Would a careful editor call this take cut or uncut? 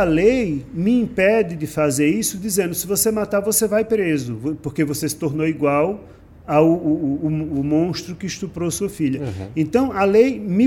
uncut